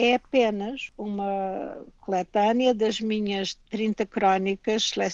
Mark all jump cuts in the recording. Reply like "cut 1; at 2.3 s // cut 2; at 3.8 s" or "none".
cut 1; at 3.6 s